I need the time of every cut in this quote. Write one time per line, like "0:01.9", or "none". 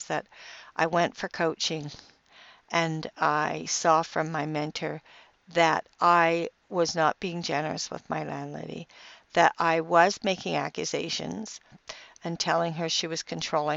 none

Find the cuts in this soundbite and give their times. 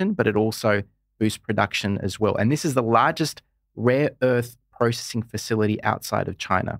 none

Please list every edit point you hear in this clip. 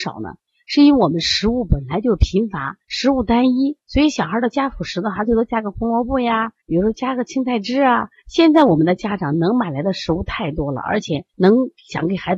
0:02.8
0:03.8
0:06.6
0:08.2
0:11.3

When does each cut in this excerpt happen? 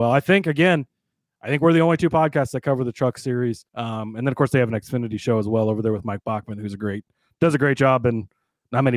0:03.7

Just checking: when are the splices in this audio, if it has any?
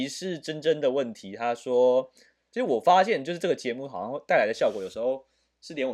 none

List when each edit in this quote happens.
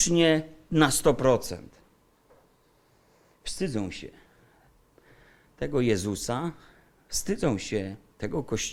none

